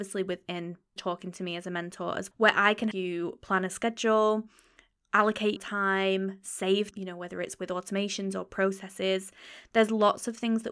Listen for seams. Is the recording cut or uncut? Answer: cut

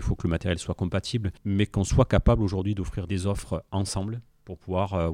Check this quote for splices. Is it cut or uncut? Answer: uncut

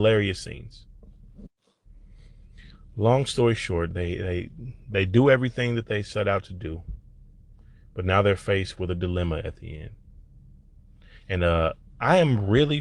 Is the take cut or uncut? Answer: uncut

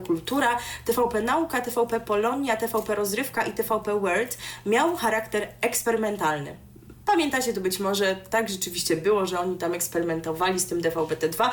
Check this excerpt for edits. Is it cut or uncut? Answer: uncut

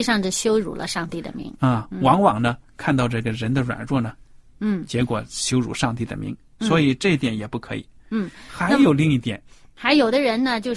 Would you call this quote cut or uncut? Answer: cut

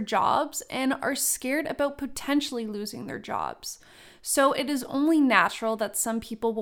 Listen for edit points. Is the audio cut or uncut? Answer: uncut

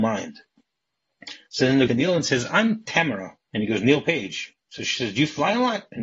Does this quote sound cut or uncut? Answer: cut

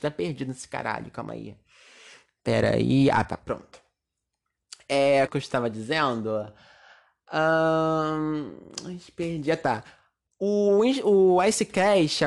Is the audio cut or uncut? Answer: cut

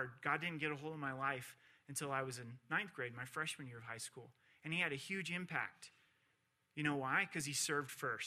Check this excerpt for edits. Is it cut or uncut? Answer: uncut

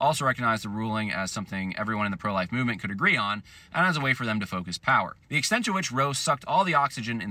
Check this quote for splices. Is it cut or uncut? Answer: cut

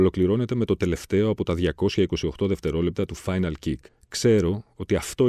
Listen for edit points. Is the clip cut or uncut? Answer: cut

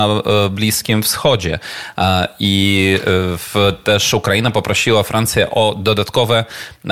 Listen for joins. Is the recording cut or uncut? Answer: uncut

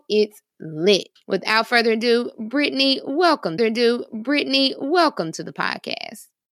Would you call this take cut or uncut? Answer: cut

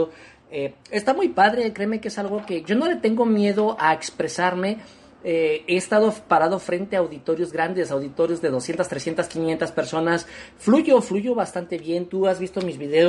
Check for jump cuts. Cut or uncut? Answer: uncut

